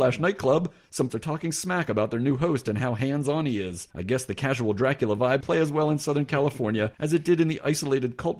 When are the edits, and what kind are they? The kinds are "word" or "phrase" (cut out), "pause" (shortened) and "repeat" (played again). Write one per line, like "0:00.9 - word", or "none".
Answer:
0:01.1 - word
0:05.4 - word